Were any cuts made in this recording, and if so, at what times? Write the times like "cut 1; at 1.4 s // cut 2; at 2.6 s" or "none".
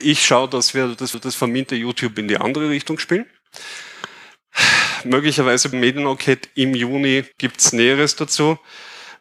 cut 1; at 1.1 s // cut 2; at 5.7 s // cut 3; at 7.3 s

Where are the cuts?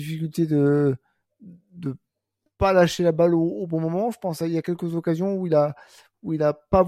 none

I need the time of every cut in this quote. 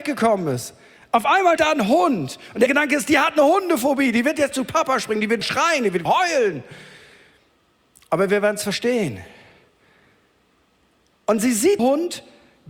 cut 1; at 1.6 s // cut 2; at 2.7 s // cut 3; at 4.5 s // cut 4; at 5.4 s // cut 5; at 6.1 s // cut 6; at 11.8 s

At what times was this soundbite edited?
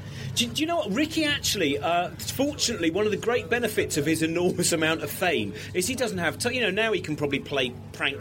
none

